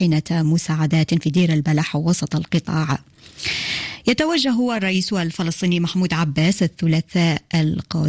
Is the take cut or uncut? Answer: uncut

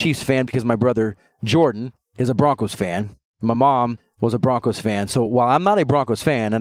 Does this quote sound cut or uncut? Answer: uncut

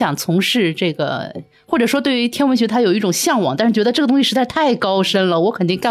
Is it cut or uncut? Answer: uncut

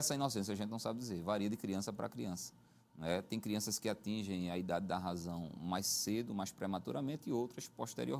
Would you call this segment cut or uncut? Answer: uncut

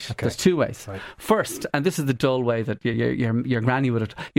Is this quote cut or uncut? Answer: uncut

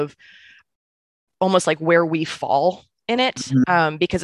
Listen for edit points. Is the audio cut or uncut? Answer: uncut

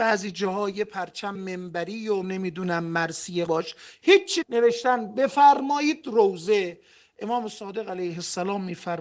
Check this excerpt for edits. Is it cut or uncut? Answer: cut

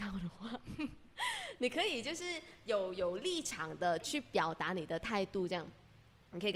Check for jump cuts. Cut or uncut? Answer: uncut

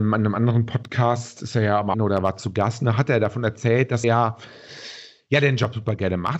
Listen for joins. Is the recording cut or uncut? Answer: cut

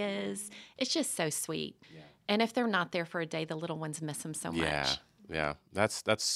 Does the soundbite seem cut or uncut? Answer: cut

